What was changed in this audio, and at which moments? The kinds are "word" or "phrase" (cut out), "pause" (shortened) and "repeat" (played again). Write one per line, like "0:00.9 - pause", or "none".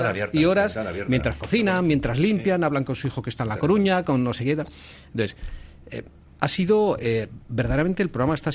none